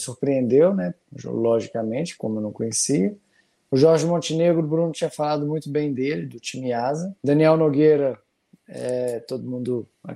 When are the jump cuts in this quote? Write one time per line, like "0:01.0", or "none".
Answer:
0:07.2